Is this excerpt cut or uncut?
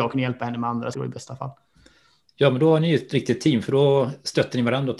cut